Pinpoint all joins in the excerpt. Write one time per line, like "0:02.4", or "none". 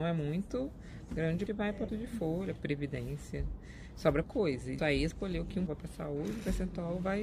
0:01.5
0:01.9
0:02.6
0:04.2
0:04.8
0:05.1
0:05.7